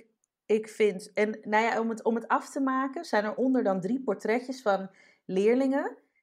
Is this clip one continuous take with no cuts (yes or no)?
yes